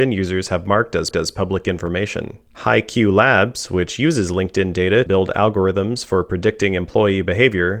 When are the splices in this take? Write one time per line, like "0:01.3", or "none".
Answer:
0:01.1
0:02.5
0:05.1